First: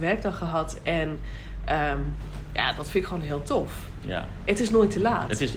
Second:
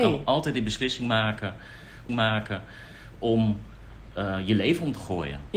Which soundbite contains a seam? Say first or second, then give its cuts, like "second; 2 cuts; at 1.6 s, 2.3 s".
second; 1 cut; at 2.1 s